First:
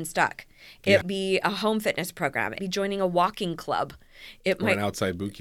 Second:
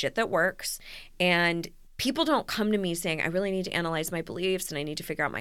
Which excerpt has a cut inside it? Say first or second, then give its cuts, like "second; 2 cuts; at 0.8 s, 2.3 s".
first; 2 cuts; at 1.0 s, 2.6 s